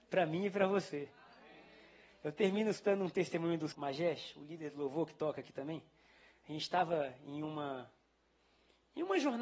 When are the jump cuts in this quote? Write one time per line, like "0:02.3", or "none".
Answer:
0:03.7